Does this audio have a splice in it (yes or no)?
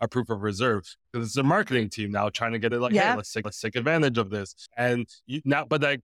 yes